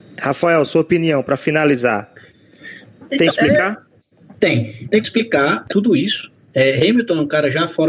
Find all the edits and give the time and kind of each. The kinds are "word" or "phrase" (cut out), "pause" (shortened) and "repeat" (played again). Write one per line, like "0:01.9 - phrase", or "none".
0:03.3 - word
0:04.0 - pause
0:05.0 - word
0:05.7 - phrase